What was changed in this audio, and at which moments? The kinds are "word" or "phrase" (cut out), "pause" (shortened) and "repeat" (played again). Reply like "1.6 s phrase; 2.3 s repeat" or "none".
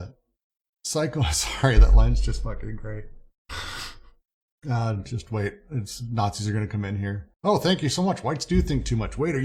7.3 s pause

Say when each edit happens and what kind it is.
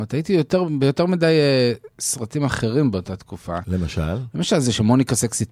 none

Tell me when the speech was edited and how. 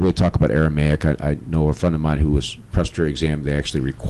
none

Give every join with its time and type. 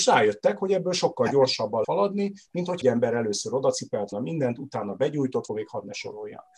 1.8 s word; 2.8 s word; 4.1 s word; 5.5 s phrase

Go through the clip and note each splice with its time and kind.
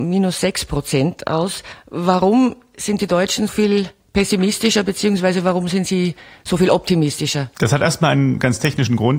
3.5 s word

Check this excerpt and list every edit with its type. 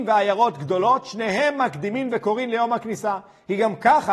none

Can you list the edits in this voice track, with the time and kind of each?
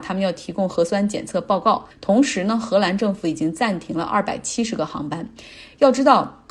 1.9 s pause

